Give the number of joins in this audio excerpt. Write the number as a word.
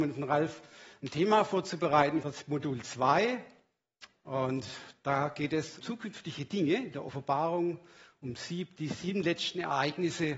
two